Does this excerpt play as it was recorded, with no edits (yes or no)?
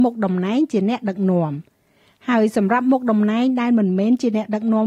yes